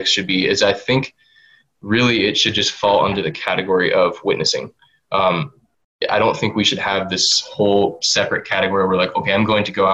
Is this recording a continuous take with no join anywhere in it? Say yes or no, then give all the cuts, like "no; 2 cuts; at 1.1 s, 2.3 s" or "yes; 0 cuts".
yes; 0 cuts